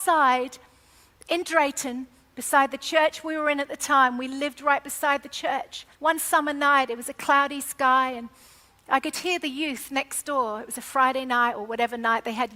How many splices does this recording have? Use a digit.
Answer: 1